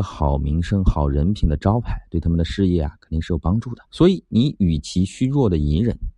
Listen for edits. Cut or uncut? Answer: cut